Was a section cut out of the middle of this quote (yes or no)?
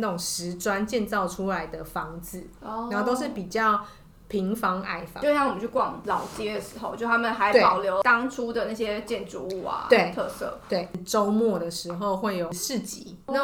no